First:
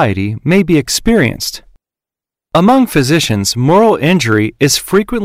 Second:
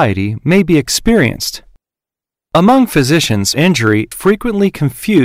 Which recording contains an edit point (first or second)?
second